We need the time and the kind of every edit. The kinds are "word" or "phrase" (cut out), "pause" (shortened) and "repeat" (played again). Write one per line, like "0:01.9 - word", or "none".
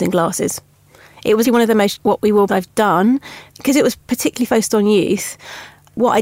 0:01.4 - word
0:02.0 - word
0:02.5 - word
0:03.5 - pause